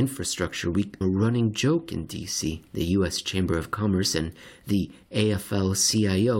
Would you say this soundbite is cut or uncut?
cut